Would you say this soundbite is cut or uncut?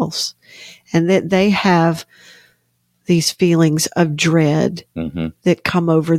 uncut